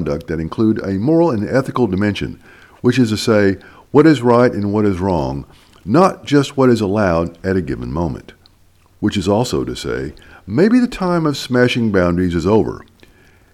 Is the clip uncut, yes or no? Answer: yes